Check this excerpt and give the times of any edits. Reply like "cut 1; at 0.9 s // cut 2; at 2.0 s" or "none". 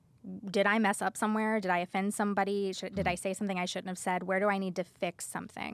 none